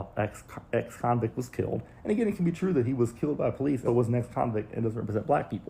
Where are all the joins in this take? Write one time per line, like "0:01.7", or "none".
0:03.9